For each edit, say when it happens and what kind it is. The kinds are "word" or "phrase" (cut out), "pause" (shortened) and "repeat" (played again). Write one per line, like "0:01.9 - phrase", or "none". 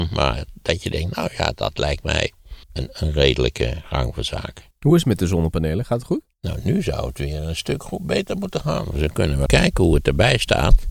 0:02.6 - pause
0:04.7 - pause
0:06.3 - pause
0:09.5 - word